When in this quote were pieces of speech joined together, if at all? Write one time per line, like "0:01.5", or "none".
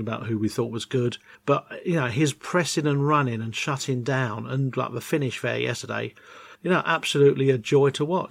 0:01.3
0:06.5